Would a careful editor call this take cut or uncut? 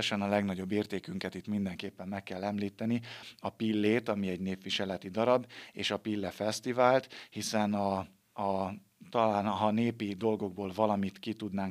uncut